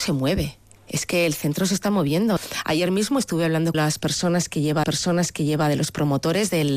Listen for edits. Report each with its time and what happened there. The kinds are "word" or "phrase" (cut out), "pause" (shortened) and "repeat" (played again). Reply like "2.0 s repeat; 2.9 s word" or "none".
3.7 s phrase; 4.8 s repeat